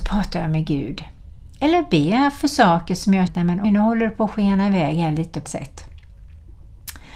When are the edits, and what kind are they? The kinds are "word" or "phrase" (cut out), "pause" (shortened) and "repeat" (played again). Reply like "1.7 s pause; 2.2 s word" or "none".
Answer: 3.3 s word; 3.6 s word; 5.5 s word